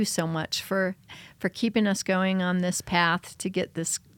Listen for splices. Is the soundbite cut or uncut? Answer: uncut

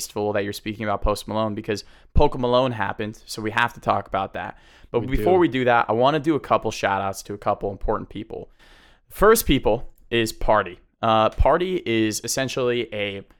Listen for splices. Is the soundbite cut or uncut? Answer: uncut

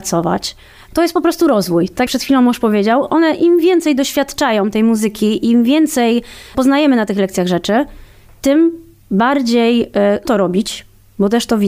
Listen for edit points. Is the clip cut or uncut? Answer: cut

